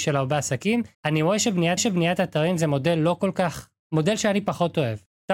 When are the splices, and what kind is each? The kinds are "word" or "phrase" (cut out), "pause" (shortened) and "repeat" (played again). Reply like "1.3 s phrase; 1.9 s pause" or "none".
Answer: 0.9 s pause; 1.8 s repeat; 3.8 s pause